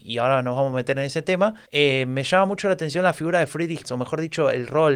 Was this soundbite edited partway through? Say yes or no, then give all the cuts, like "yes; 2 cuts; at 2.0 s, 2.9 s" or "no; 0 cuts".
yes; 2 cuts; at 1.6 s, 3.8 s